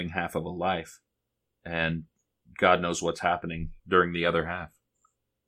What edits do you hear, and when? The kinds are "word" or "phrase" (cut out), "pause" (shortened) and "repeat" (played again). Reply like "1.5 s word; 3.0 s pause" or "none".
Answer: 1.2 s pause; 3.8 s pause